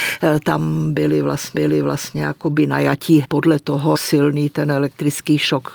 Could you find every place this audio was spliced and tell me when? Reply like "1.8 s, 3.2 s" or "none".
1.5 s, 3.2 s, 3.9 s